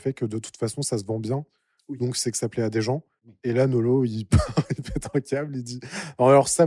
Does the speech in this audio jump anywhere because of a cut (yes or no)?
no